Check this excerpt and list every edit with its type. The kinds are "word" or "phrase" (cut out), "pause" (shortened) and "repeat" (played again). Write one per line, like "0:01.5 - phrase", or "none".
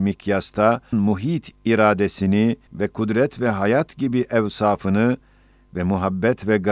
0:00.9 - word
0:01.5 - word
0:02.7 - phrase